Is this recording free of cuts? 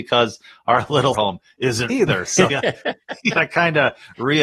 no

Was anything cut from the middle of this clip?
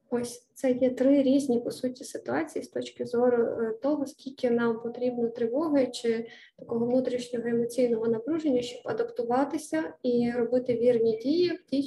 no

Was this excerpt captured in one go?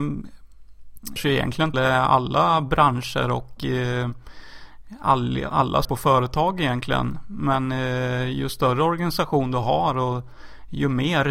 no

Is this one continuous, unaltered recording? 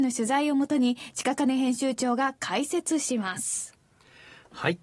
yes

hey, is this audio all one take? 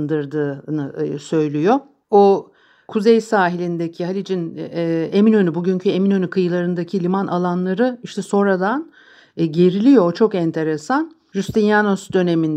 yes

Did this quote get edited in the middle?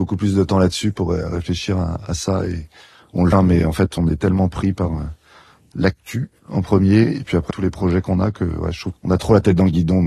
yes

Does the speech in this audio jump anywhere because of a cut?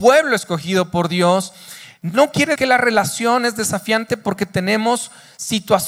yes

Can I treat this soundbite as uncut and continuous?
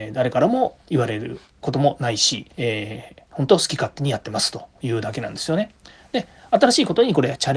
no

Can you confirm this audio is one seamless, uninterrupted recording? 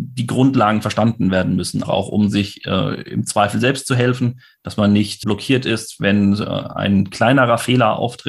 no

